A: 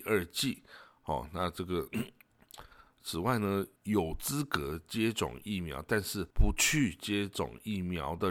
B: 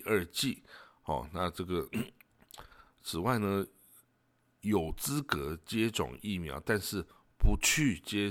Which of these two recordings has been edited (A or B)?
A